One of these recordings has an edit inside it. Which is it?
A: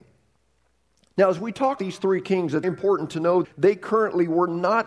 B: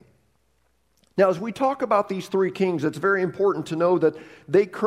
A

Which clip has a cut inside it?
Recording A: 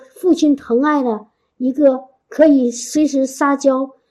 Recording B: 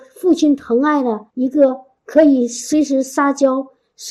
B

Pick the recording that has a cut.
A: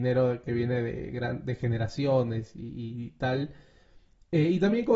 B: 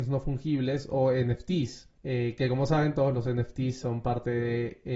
B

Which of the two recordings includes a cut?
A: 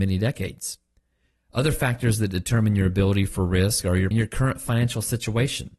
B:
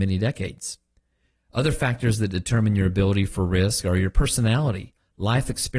A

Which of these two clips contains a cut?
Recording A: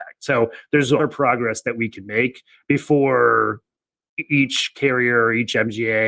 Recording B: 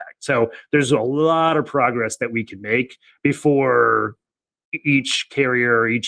A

